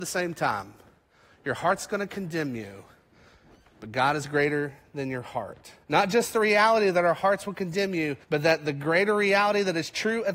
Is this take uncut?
no; 2 cuts; at 5.8 s, 8.2 s

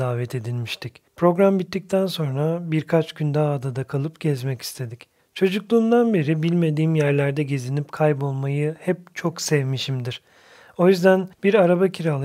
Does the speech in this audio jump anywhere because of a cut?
yes; 2 cuts; at 1.1 s, 11.3 s

